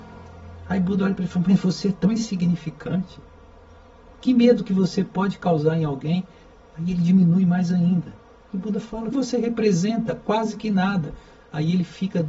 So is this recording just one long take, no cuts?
no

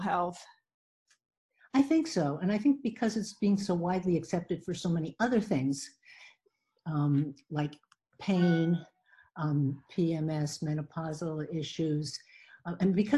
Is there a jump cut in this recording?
no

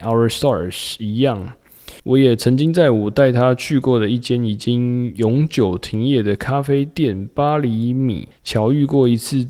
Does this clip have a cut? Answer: yes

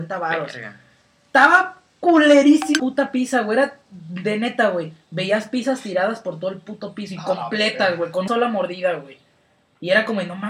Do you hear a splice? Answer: yes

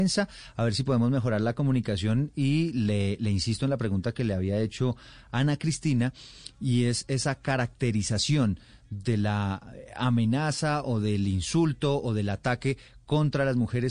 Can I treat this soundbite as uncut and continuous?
yes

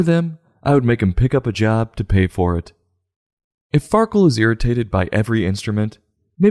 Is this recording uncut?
yes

